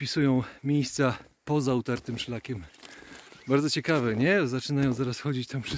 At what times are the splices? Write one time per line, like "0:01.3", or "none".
none